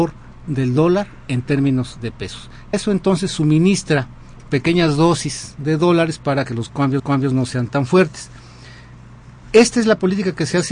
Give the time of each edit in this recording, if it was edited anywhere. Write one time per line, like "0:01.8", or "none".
0:02.7
0:07.0
0:09.4